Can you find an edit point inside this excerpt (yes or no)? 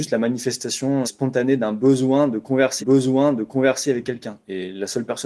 yes